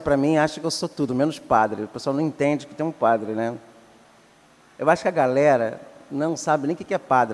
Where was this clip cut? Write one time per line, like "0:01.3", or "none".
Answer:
none